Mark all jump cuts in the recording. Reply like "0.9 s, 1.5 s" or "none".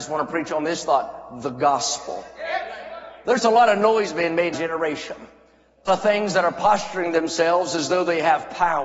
4.5 s, 5.9 s